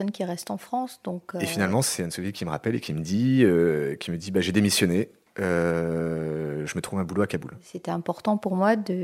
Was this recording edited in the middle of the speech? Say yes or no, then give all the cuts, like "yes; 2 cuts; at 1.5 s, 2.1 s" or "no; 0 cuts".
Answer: no; 0 cuts